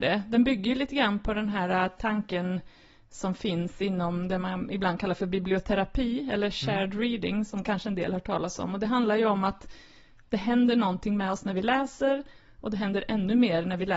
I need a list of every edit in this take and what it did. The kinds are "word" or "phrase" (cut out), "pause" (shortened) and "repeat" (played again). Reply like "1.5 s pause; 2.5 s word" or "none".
none